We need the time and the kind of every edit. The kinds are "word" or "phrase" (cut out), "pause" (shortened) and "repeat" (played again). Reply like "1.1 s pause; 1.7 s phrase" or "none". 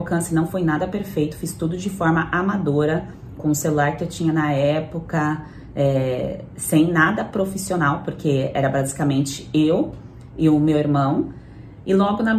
3.4 s word